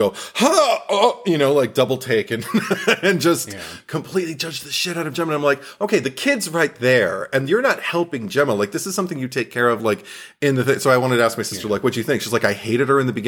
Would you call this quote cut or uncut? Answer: uncut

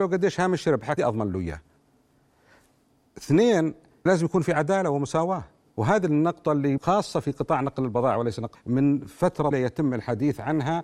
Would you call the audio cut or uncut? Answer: cut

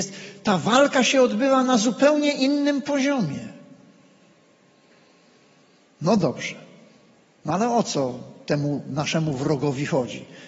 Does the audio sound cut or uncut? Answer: uncut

